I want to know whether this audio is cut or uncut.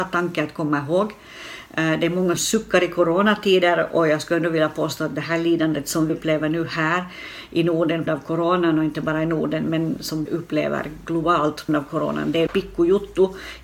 cut